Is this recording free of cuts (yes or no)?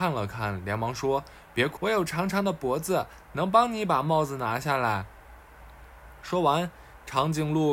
no